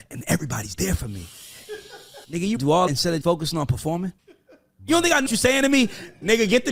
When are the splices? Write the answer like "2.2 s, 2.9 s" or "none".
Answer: 2.2 s, 2.6 s, 2.9 s, 3.2 s, 4.2 s, 5.3 s